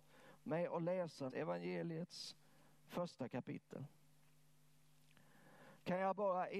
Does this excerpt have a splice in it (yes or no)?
yes